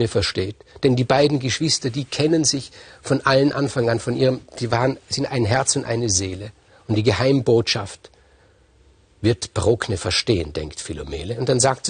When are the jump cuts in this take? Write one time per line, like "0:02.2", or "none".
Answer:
none